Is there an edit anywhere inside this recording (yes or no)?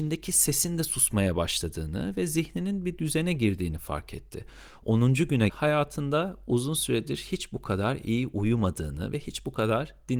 yes